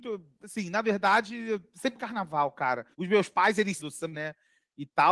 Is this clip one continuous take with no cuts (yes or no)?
no